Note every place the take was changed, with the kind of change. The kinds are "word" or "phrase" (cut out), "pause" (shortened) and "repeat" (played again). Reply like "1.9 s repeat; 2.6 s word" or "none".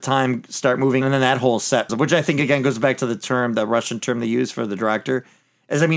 1.0 s word; 1.9 s word